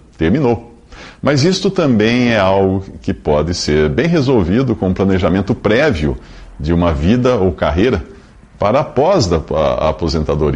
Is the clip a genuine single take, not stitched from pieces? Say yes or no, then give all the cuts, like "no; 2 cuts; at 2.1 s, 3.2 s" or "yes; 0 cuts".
yes; 0 cuts